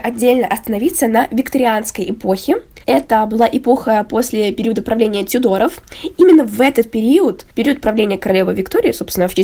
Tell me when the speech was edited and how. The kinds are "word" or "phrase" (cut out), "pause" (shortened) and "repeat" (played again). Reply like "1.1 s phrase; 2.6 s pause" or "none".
2.8 s pause; 7.5 s pause